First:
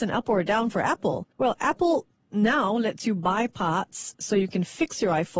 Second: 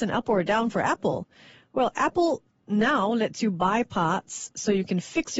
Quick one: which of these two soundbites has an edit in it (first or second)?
first